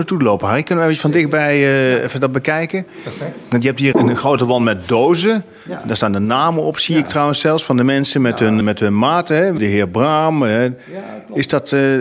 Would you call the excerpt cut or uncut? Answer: cut